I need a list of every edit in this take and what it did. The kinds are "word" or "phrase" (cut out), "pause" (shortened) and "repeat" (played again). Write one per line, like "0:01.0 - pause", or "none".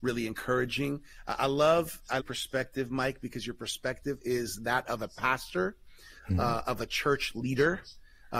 0:01.4 - word
0:02.2 - phrase